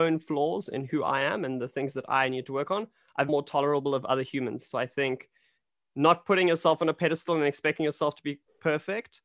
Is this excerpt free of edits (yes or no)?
no